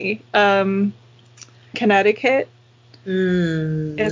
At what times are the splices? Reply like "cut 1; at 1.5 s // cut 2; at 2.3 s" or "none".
cut 1; at 1.7 s